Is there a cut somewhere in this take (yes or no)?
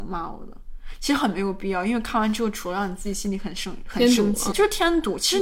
yes